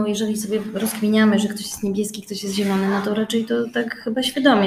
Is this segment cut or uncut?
uncut